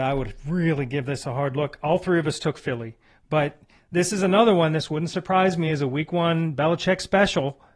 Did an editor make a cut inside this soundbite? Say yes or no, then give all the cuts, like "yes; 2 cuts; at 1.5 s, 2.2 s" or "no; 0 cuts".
no; 0 cuts